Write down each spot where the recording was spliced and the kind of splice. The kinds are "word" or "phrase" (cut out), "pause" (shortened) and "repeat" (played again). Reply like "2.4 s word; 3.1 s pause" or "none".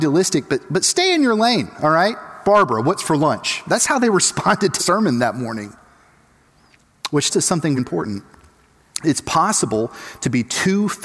4.8 s word; 7.3 s word; 7.8 s word